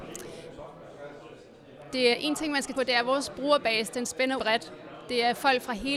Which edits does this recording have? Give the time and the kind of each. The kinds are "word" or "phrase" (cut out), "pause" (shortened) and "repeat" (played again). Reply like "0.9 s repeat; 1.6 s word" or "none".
2.1 s word; 2.7 s word; 4.4 s word